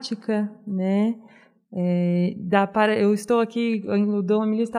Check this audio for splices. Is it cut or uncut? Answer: uncut